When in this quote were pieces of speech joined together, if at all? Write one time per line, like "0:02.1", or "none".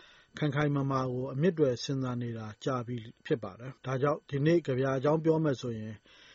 0:03.8